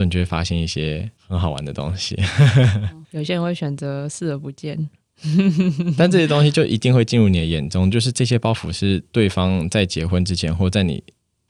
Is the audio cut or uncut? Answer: cut